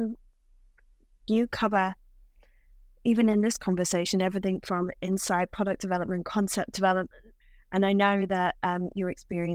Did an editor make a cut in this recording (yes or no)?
no